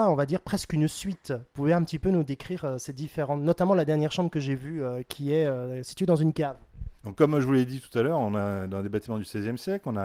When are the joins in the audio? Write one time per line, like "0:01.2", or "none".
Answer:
0:07.0

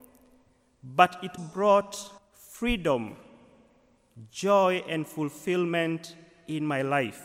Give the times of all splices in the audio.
0:01.4
0:02.2

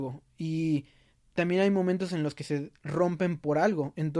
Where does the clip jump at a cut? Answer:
none

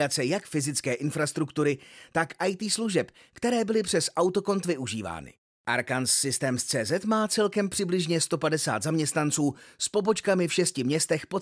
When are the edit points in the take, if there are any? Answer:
none

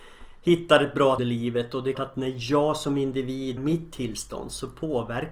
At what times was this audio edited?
0:01.2
0:01.9
0:03.6

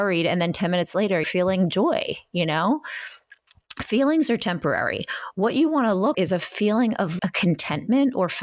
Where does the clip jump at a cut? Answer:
0:01.2
0:06.1
0:07.2

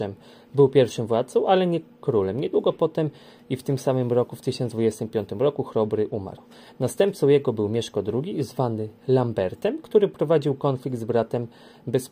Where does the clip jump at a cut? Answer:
none

